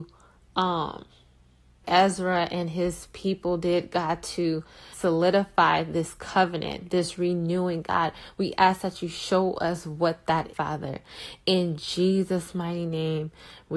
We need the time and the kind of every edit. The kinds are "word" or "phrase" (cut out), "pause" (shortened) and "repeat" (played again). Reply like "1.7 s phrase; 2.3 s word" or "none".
1.8 s word; 4.9 s word; 10.5 s word